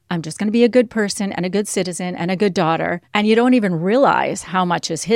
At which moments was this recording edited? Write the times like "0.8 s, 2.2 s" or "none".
3.0 s